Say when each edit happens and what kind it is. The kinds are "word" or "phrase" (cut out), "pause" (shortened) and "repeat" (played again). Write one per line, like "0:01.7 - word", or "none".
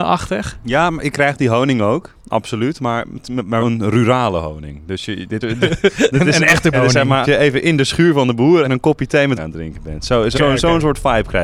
0:01.1 - word
0:03.6 - word
0:05.4 - word
0:06.7 - word
0:07.2 - word
0:08.6 - word
0:09.4 - word
0:10.3 - word